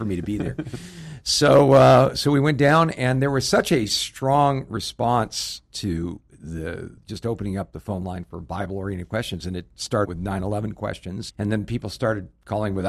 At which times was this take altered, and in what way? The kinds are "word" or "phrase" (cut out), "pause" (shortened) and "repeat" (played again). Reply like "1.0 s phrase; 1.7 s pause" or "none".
7.0 s pause; 10.1 s word; 11.3 s word